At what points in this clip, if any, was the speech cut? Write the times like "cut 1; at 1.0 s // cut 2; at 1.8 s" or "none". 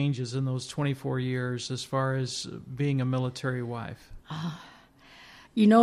cut 1; at 4.2 s